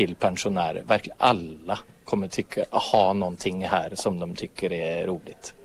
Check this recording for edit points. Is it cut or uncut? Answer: cut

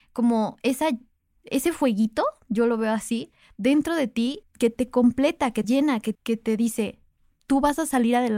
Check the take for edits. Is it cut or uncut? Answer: cut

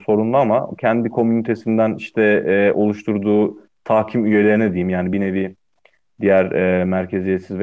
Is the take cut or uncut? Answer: uncut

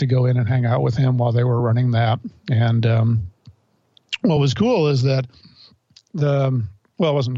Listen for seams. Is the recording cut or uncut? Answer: uncut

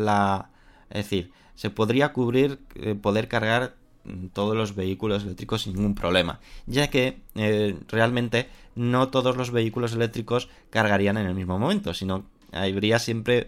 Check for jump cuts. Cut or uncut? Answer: uncut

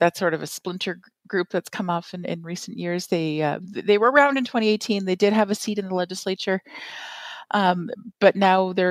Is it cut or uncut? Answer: uncut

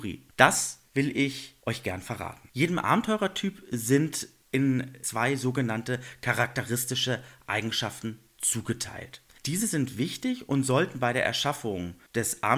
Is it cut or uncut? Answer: cut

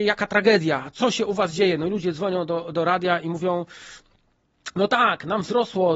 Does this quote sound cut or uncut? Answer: uncut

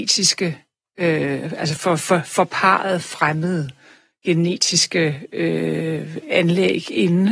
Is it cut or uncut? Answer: uncut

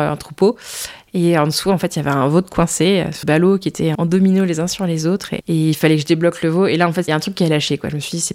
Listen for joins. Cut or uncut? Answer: cut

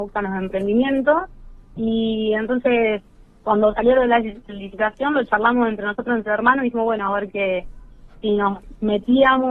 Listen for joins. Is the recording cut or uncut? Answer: uncut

